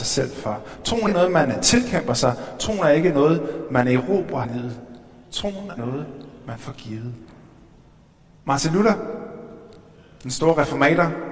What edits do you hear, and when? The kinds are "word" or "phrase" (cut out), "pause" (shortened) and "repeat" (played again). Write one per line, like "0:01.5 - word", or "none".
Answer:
0:01.1 - word
0:04.4 - word
0:05.8 - word
0:08.1 - pause